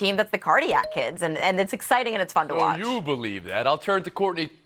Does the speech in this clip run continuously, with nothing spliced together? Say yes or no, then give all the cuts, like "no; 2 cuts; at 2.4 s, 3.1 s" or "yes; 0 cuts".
yes; 0 cuts